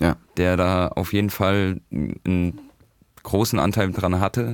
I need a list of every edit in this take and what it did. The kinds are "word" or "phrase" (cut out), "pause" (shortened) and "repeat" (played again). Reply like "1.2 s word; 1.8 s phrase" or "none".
none